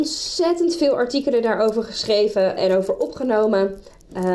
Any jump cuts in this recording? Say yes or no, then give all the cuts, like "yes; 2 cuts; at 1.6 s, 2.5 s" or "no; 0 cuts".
yes; 1 cut; at 2.6 s